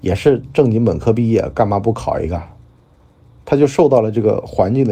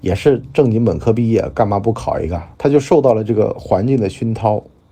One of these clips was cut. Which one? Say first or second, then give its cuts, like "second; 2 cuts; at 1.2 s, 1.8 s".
second; 1 cut; at 2.5 s